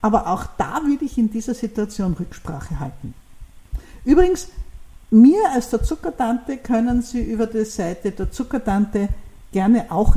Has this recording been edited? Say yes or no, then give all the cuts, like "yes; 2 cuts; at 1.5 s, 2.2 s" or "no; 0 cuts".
yes; 1 cut; at 5.0 s